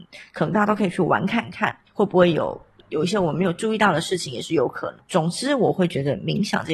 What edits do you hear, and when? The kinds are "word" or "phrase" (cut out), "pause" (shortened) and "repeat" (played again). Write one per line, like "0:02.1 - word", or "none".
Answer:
none